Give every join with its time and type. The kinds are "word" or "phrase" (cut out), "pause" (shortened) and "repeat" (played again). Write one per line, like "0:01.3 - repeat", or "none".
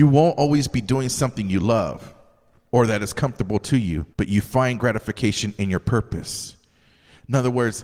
0:04.1 - pause